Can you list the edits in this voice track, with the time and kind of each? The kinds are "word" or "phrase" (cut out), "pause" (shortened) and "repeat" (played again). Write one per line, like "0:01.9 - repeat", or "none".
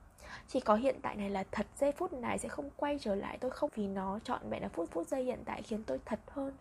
0:03.7 - word
0:04.9 - repeat